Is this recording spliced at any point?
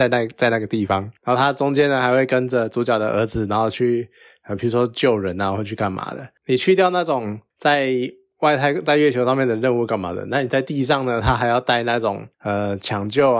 no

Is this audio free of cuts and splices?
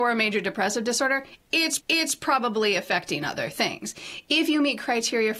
no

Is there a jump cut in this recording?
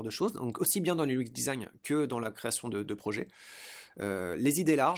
no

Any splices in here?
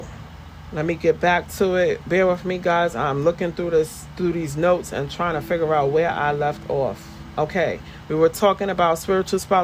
no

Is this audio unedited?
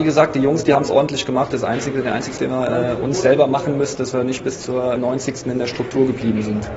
no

